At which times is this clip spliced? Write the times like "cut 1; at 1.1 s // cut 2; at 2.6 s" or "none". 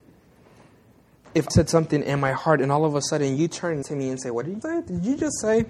cut 1; at 1.5 s // cut 2; at 3.8 s // cut 3; at 4.6 s